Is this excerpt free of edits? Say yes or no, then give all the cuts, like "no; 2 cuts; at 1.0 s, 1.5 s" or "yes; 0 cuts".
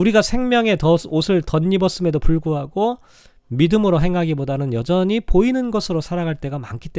yes; 0 cuts